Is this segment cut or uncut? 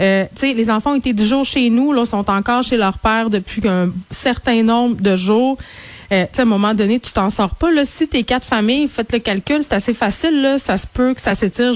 uncut